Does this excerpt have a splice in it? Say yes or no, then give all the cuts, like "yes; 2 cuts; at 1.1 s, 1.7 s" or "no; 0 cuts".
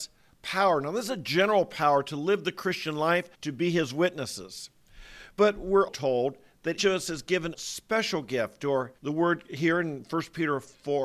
yes; 6 cuts; at 3.3 s, 5.3 s, 5.9 s, 6.8 s, 7.5 s, 9.0 s